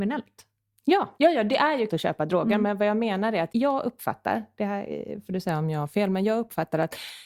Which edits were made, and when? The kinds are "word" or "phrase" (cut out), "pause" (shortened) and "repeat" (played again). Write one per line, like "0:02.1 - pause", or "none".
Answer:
0:01.2 - pause
0:01.9 - word
0:03.5 - word